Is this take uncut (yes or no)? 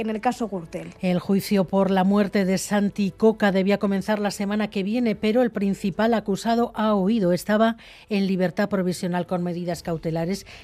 yes